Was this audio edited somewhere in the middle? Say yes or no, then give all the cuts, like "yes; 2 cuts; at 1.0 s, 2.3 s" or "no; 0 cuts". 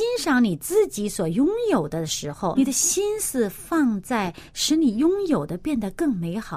yes; 1 cut; at 2.5 s